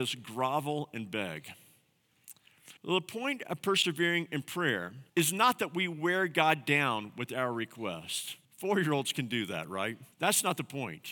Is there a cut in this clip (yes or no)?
yes